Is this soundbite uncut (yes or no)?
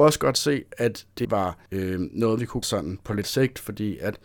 no